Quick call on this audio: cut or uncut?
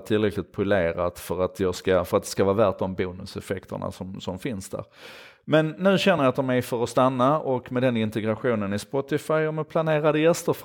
uncut